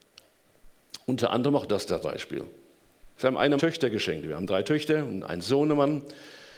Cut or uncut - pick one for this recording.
cut